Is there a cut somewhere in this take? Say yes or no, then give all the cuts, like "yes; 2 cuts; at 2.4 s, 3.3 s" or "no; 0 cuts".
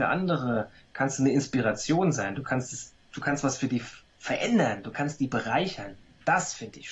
no; 0 cuts